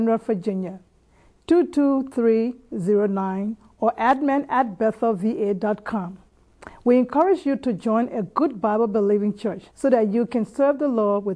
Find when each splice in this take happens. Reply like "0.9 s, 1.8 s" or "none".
9.7 s